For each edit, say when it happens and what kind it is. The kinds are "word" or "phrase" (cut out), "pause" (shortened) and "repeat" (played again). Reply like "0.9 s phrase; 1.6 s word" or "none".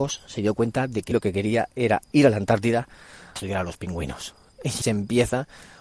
1.1 s word; 3.4 s word; 4.8 s word